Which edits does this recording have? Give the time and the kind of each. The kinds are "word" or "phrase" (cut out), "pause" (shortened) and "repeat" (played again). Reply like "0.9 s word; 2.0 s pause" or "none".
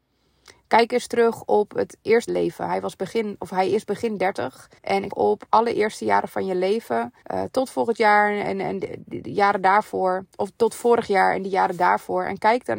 2.3 s phrase; 4.8 s pause; 5.1 s phrase; 7.2 s pause

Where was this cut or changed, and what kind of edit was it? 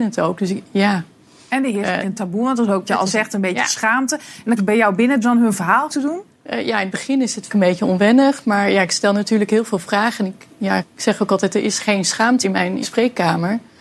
2.0 s word; 2.9 s word; 4.6 s word; 5.2 s word; 5.9 s word; 7.5 s word; 10.8 s word; 12.4 s word; 12.8 s word

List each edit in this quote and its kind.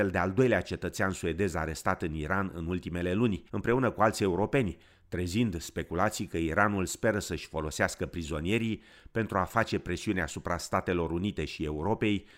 3.5 s pause

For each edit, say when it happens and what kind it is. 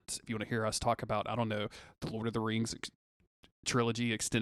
none

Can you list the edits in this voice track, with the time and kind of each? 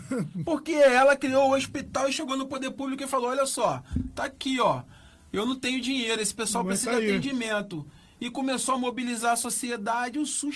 none

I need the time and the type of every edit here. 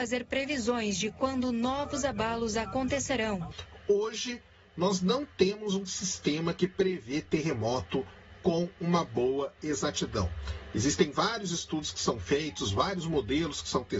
none

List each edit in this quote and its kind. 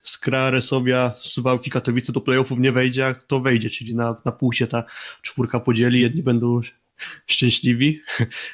none

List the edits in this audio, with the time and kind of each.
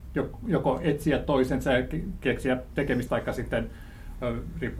3.1 s word

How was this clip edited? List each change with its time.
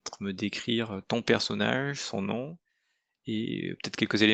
none

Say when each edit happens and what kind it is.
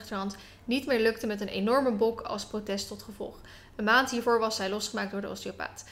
none

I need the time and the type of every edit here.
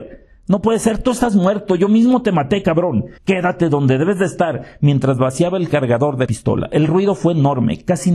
3.2 s pause; 6.3 s word

